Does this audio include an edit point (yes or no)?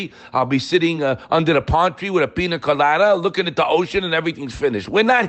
no